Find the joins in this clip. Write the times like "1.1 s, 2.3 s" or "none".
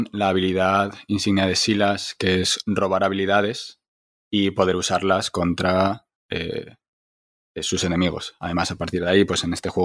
none